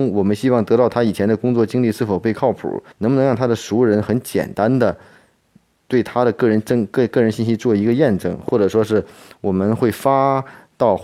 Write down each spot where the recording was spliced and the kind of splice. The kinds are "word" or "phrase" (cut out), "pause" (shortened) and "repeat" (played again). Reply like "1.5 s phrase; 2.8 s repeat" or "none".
2.9 s pause

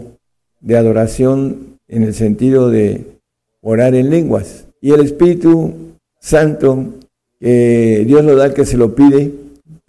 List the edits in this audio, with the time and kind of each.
4.7 s pause

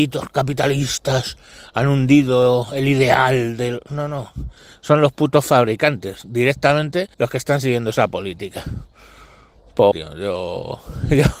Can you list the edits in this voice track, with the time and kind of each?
7.1 s pause; 9.9 s word

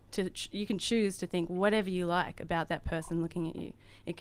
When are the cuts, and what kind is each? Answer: none

